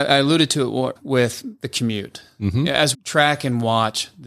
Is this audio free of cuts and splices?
no; 2 cuts; at 1.0 s, 2.9 s

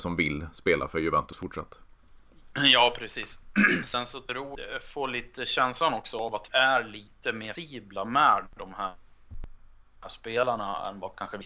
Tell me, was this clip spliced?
yes; 3 cuts; at 4.5 s, 6.5 s, 7.5 s

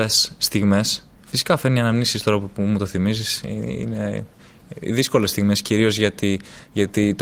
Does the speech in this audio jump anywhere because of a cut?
no; 0 cuts

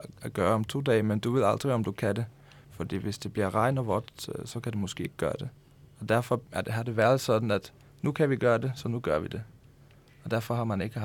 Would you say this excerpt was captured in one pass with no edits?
yes; 0 cuts

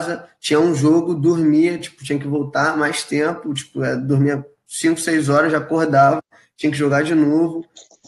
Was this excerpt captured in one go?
yes; 0 cuts

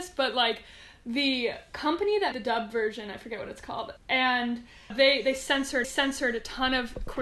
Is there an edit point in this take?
yes; 4 cuts; at 2.3 s, 4.0 s, 4.9 s, 5.8 s

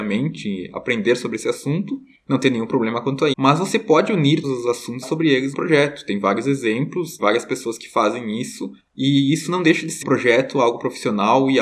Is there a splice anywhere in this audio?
yes; 6 cuts; at 3.3 s, 4.4 s, 5.0 s, 5.5 s, 7.2 s, 10.0 s

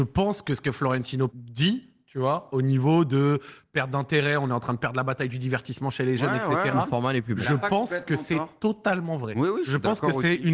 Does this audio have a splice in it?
yes; 1 cut; at 1.3 s

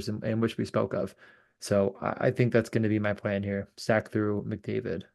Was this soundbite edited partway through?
no; 0 cuts

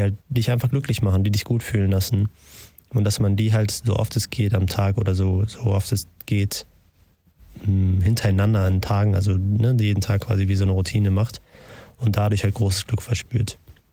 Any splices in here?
no; 0 cuts

